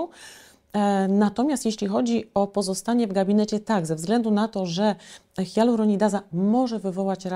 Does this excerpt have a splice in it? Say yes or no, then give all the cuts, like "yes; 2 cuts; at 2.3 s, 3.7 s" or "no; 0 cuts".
no; 0 cuts